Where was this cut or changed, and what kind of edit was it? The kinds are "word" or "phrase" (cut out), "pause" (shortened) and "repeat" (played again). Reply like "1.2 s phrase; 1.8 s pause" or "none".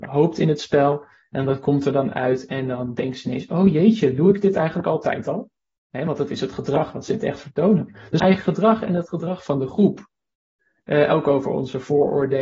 8.2 s phrase